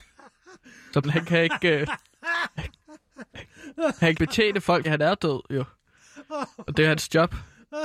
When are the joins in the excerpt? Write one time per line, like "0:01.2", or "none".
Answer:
0:01.0
0:04.1
0:04.8
0:06.5